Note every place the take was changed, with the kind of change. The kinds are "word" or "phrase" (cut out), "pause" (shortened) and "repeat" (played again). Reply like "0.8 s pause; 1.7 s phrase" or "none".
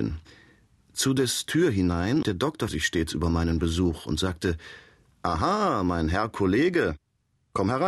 1.5 s word; 2.2 s word; 2.7 s word